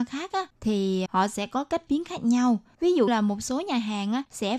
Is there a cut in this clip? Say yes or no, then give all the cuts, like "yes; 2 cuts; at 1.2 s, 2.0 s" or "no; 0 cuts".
yes; 3 cuts; at 1.1 s, 1.9 s, 3.1 s